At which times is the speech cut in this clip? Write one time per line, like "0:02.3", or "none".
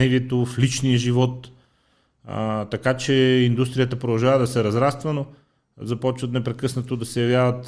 none